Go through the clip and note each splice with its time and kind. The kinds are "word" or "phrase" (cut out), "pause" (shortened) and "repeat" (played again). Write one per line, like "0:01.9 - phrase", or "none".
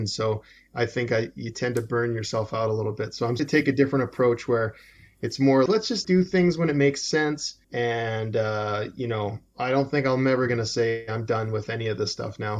0:03.4 - word
0:05.7 - word
0:06.0 - word
0:07.6 - pause